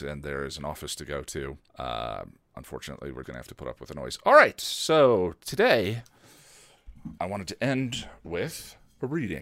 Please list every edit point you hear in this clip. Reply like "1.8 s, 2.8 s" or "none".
1.7 s, 3.2 s, 7.2 s